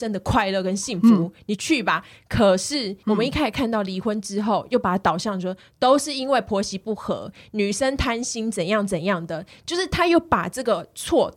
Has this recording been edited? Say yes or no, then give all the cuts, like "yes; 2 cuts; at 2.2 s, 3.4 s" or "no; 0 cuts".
no; 0 cuts